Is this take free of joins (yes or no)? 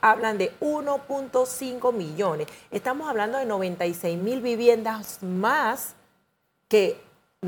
yes